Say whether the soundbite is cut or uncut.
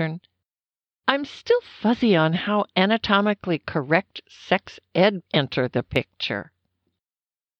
cut